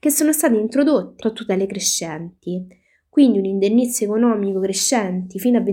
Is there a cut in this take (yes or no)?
yes